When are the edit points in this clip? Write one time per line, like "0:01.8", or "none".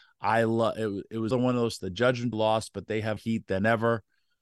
0:01.3
0:01.8
0:02.3
0:03.2